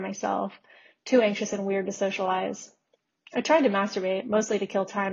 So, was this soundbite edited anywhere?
no; 0 cuts

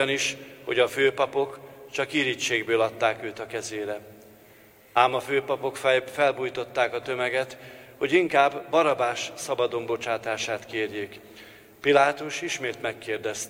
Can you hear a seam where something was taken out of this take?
no; 0 cuts

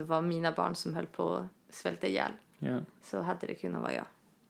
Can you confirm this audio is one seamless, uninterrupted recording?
yes; 0 cuts

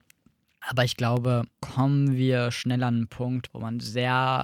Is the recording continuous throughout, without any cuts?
no; 1 cut; at 3.5 s

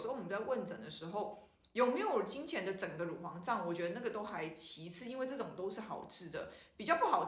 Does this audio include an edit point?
no; 0 cuts

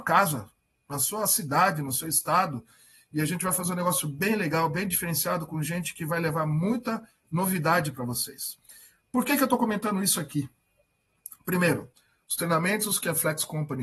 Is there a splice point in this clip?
no; 0 cuts

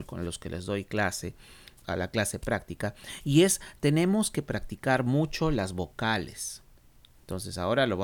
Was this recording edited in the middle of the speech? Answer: yes; 1 cut; at 1.8 s

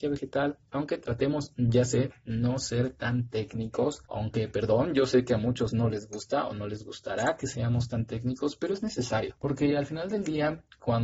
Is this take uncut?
yes; 0 cuts

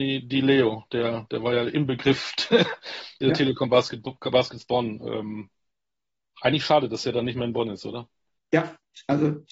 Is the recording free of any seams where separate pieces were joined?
yes; 0 cuts

